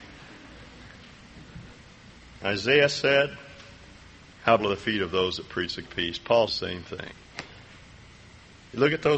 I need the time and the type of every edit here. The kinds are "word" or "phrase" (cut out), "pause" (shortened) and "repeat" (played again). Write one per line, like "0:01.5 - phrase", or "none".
0:04.6 - word
0:05.8 - word
0:06.5 - word